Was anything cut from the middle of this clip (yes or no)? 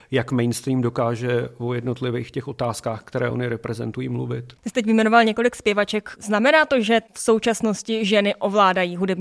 no